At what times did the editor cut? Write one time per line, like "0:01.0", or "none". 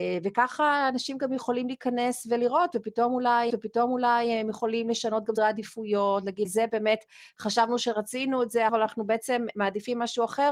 0:03.5
0:05.4
0:06.4
0:08.7